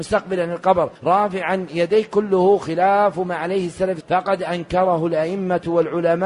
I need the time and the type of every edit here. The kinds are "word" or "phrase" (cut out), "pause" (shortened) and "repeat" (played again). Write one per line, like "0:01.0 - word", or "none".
0:01.0 - pause
0:04.0 - word